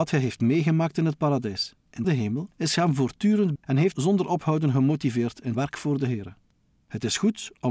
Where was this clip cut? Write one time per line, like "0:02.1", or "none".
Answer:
0:02.0
0:03.6
0:03.9
0:05.5